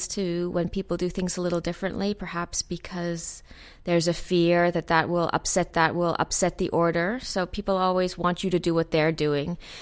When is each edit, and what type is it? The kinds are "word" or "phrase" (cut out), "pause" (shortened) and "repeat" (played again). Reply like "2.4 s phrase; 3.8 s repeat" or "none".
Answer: 5.7 s repeat